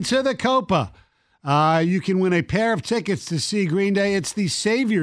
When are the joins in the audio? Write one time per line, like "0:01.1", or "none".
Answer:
none